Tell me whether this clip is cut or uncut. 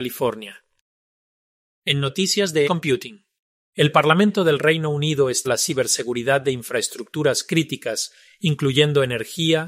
cut